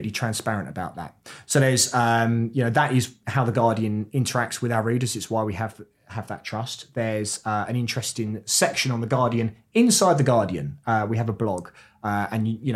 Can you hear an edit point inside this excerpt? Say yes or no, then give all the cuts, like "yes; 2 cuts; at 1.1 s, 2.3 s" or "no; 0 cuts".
no; 0 cuts